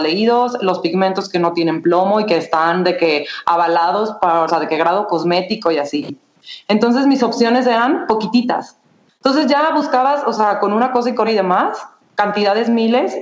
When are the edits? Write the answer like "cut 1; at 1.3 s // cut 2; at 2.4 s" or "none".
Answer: cut 1; at 4.5 s // cut 2; at 11.3 s